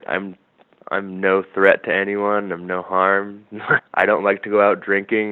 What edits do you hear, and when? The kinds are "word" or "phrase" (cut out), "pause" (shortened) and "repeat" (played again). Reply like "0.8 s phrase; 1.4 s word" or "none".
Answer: 3.8 s word